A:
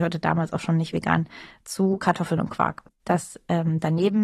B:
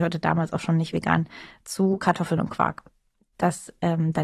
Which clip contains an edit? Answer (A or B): A